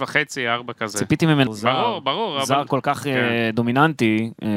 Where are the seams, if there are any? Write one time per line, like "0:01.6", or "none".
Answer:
0:01.5